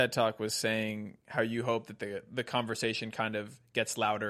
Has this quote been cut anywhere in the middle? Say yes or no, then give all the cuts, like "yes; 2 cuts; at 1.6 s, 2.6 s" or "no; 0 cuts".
no; 0 cuts